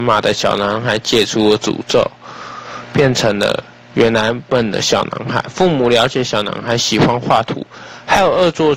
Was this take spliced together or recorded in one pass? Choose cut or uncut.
uncut